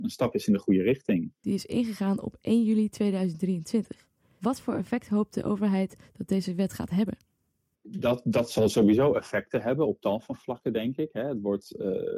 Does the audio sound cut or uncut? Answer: uncut